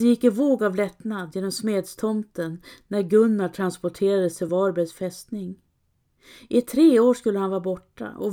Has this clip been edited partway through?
no; 0 cuts

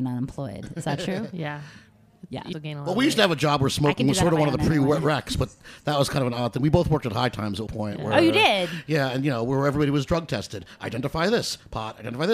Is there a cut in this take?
yes; 2 cuts; at 2.5 s, 7.7 s

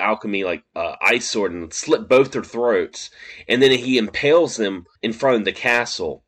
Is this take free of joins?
no; 1 cut; at 5.0 s

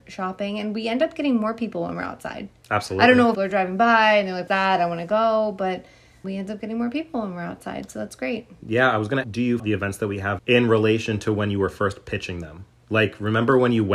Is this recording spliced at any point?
yes; 6 cuts; at 3.3 s, 4.5 s, 6.2 s, 9.2 s, 9.6 s, 10.4 s

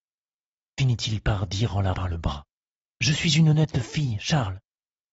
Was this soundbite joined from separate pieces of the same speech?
yes; 2 cuts; at 1.9 s, 2.8 s

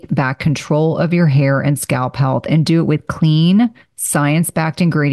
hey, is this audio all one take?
yes; 0 cuts

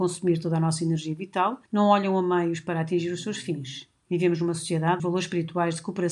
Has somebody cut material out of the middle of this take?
yes; 2 cuts; at 1.7 s, 5.0 s

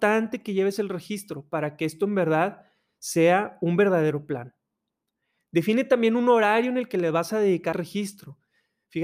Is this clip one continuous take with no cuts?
no; 1 cut; at 7.7 s

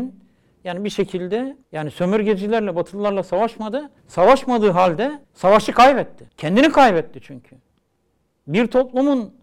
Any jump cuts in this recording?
yes; 4 cuts; at 1.6 s, 4.0 s, 5.2 s, 6.3 s

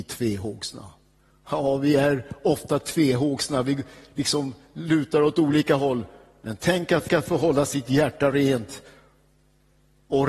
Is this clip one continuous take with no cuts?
no; 1 cut; at 7.1 s

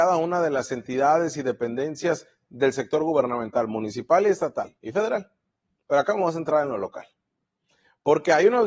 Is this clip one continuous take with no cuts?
no; 1 cut; at 4.8 s

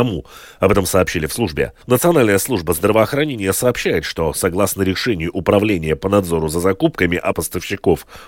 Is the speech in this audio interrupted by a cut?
yes; 2 cuts; at 1.8 s, 7.3 s

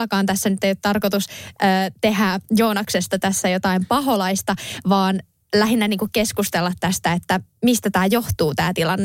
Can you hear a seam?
no; 0 cuts

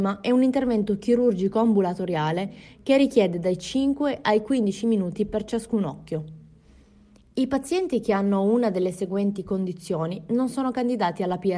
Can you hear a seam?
no; 0 cuts

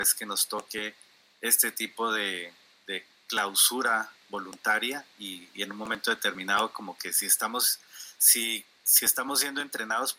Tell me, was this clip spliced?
no; 0 cuts

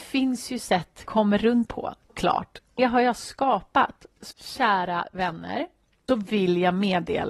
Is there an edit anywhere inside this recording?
yes; 6 cuts; at 1.1 s, 1.7 s, 2.1 s, 2.8 s, 4.3 s, 6.1 s

